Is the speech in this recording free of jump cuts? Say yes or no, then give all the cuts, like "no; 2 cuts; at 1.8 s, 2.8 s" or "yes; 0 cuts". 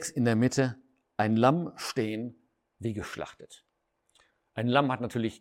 yes; 0 cuts